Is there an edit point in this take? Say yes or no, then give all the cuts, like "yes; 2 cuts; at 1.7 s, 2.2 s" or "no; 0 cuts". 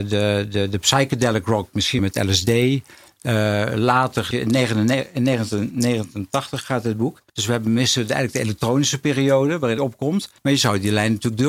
yes; 5 cuts; at 2.0 s, 4.3 s, 7.3 s, 9.8 s, 10.4 s